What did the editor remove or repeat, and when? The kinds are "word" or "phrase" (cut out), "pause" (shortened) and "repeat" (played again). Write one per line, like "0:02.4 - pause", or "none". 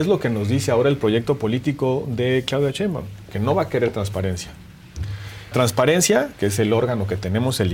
0:05.5 - word